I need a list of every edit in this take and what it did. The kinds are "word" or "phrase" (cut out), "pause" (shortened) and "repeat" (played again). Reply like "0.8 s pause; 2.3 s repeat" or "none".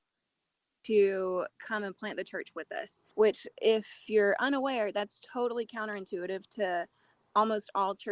3.1 s pause